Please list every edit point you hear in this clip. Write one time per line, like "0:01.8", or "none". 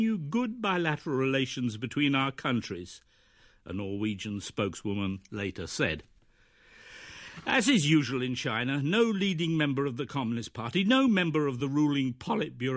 none